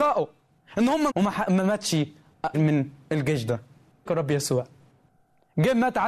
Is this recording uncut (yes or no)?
no